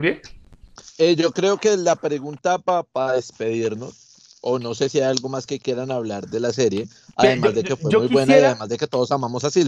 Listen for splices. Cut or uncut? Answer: uncut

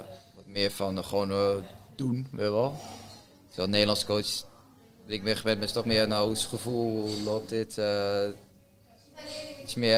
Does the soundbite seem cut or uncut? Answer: uncut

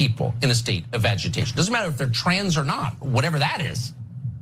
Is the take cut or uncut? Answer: uncut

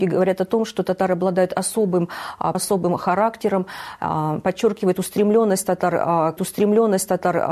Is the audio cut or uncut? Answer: cut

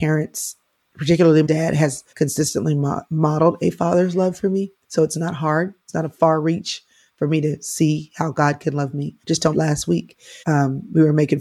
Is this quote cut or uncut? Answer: cut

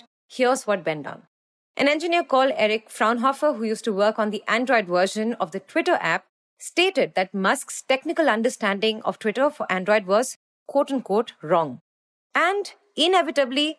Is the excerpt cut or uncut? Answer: uncut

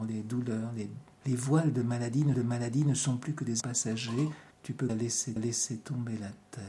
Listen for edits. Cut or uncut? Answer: cut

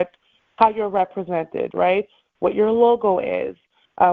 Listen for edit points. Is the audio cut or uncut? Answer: uncut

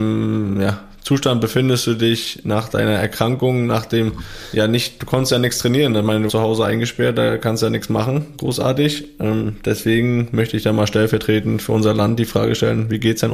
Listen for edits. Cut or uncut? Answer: cut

